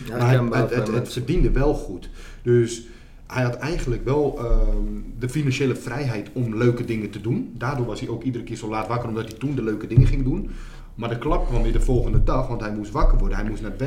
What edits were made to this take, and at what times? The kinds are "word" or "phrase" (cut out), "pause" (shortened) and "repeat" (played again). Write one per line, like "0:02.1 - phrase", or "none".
none

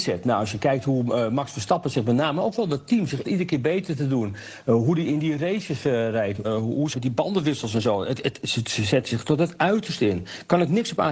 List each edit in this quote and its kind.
0:03.2 - phrase
0:06.4 - word
0:06.9 - word

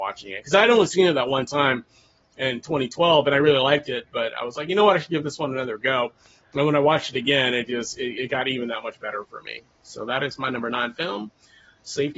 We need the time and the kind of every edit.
none

